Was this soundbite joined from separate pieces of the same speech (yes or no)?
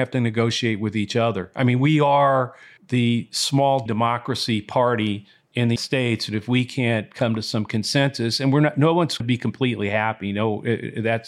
yes